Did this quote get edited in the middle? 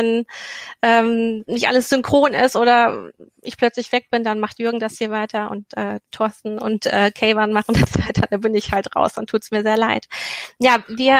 no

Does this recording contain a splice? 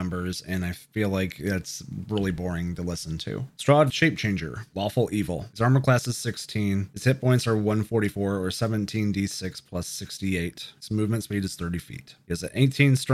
yes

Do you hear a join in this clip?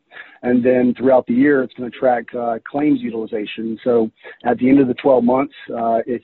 no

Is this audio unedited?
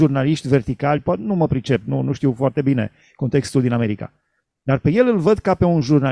yes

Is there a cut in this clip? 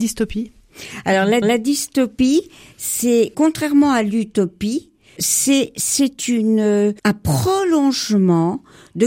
yes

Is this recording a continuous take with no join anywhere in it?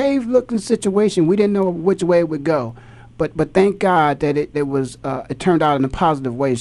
no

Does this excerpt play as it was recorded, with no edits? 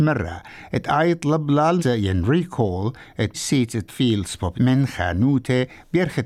no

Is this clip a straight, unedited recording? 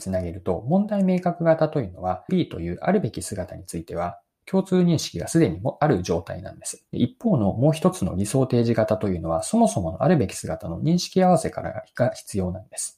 no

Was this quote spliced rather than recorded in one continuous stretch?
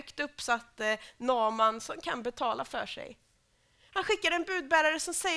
no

